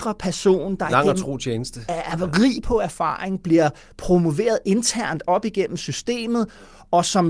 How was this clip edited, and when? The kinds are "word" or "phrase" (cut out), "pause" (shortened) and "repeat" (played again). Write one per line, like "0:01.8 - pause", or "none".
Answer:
none